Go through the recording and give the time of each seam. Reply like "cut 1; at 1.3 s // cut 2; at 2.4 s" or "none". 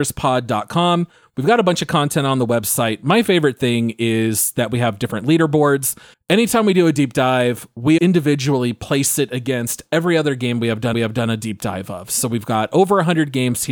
cut 1; at 6.1 s // cut 2; at 8.0 s // cut 3; at 10.9 s